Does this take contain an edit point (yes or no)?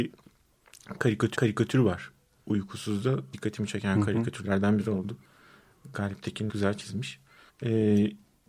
yes